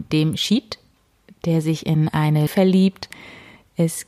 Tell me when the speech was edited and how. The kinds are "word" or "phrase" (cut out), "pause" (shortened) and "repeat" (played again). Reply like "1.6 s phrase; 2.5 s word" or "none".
2.5 s word